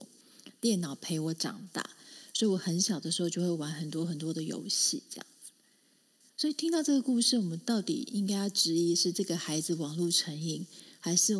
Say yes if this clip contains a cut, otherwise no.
no